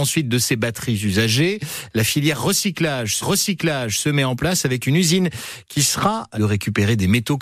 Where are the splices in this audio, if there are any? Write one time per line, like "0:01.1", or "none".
0:03.2
0:06.3